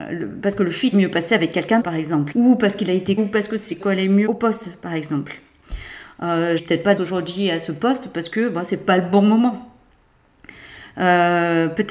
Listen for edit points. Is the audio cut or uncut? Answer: cut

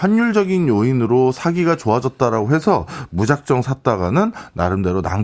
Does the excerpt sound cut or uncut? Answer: uncut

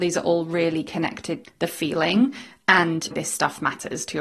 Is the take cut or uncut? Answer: cut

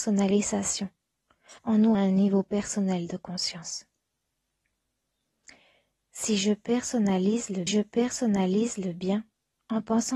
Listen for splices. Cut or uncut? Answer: cut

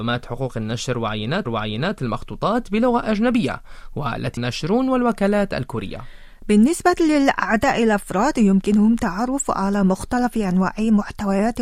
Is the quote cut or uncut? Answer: cut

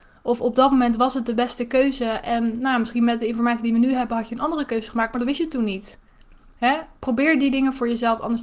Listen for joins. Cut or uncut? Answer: uncut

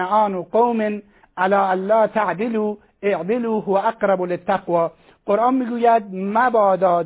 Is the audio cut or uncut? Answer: uncut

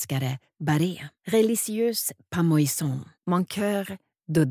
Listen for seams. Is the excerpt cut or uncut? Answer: cut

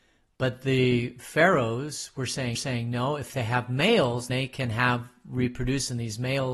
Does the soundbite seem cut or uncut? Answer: cut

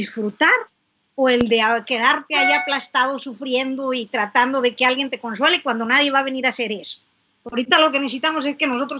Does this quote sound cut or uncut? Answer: uncut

